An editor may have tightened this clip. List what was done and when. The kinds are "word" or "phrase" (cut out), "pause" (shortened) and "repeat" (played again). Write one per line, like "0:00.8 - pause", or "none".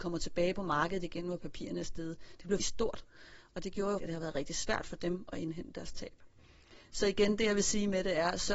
0:02.6 - word
0:04.0 - word

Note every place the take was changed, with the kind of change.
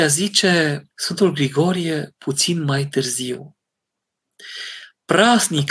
0:00.9 - pause

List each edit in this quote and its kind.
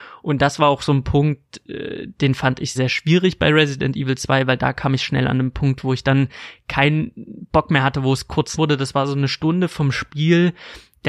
0:02.7 - word
0:08.5 - word

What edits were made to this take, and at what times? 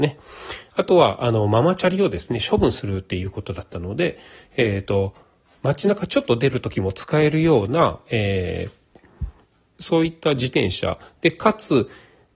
none

